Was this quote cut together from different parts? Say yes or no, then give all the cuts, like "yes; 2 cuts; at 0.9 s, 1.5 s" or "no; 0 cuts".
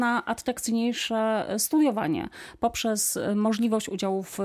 no; 0 cuts